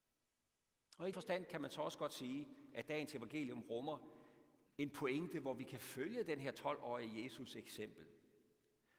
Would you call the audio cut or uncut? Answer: cut